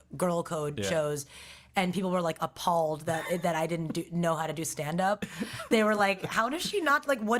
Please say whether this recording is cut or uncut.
uncut